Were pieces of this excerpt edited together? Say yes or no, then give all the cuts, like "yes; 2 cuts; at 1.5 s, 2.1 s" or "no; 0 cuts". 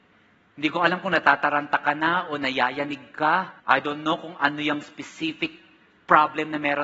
yes; 1 cut; at 3.6 s